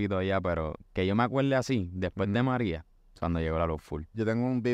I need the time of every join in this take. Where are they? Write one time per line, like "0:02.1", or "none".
none